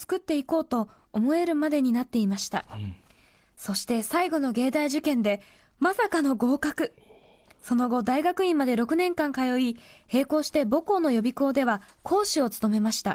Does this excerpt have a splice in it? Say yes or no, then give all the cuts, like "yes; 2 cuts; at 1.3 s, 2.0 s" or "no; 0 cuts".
no; 0 cuts